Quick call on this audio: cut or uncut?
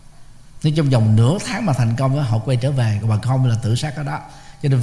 uncut